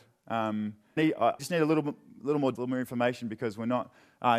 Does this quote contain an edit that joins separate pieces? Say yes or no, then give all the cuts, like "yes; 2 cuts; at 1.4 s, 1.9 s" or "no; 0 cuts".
yes; 3 cuts; at 1.0 s, 1.4 s, 2.6 s